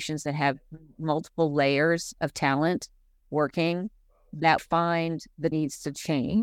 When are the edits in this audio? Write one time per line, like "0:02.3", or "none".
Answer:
0:04.6
0:05.5